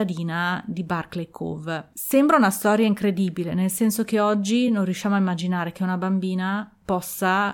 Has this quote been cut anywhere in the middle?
no; 0 cuts

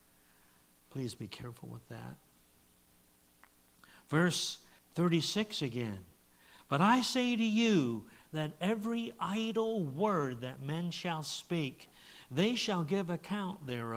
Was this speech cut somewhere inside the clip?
yes; 1 cut; at 4.8 s

